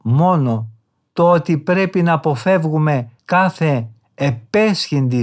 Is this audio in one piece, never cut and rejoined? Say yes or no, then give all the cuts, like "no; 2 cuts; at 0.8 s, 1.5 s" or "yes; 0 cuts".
no; 1 cut; at 3.2 s